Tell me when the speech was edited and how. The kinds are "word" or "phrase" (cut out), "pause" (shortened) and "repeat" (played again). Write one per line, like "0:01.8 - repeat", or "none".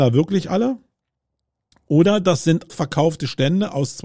0:02.7 - word